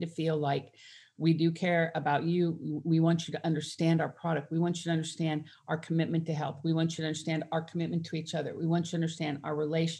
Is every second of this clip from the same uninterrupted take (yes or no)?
yes